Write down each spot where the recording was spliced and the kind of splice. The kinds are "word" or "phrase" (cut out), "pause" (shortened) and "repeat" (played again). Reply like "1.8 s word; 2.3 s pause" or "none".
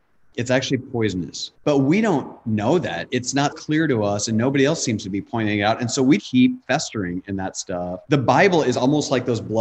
1.5 s pause; 3.5 s word; 6.2 s word; 8.0 s pause